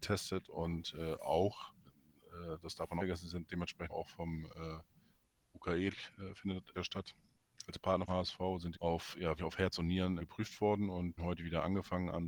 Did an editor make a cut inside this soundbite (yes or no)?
yes